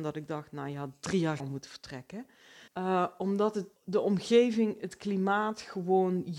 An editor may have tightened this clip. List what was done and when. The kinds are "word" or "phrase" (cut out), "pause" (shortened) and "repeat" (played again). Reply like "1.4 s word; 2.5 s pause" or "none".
1.4 s word; 2.7 s pause; 3.8 s pause